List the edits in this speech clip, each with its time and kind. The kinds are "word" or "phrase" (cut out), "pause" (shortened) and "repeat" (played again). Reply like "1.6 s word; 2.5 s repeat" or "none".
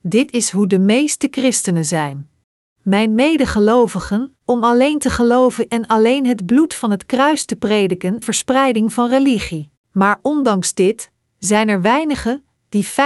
2.6 s pause; 4.4 s pause; 5.7 s word; 8.2 s phrase; 9.8 s pause